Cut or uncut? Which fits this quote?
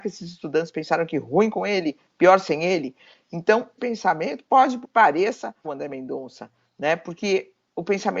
cut